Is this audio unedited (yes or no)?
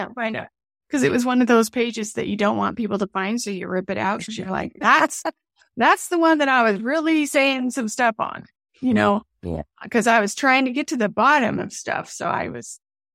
yes